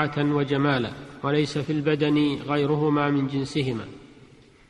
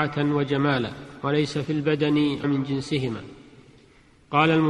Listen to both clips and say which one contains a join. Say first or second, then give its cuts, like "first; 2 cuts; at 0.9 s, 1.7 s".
second; 1 cut; at 2.4 s